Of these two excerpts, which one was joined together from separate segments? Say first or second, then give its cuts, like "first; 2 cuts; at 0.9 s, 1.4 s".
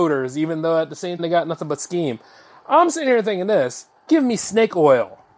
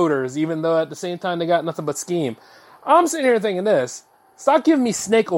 first; 2 cuts; at 1.2 s, 4.1 s